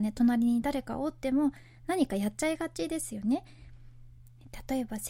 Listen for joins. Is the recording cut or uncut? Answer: uncut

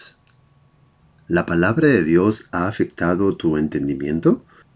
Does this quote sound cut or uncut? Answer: uncut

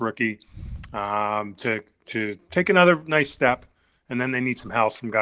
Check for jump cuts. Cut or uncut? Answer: uncut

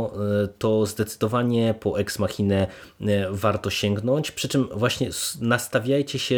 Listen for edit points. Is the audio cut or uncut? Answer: uncut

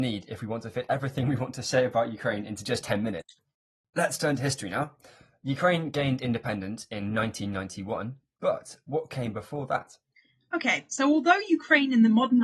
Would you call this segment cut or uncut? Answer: uncut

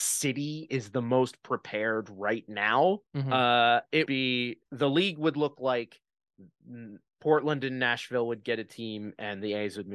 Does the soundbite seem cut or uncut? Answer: cut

